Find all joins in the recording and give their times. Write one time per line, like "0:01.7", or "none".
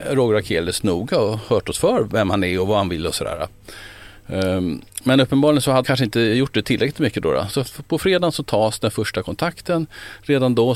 0:05.8